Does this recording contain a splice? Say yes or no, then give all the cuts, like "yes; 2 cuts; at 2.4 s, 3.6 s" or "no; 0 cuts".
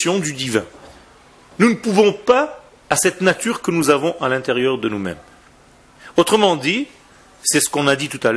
yes; 1 cut; at 2.8 s